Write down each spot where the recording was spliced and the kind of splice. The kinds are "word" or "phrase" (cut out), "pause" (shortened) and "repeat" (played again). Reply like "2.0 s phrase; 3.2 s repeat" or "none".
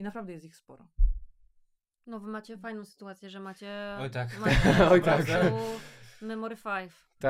1.8 s pause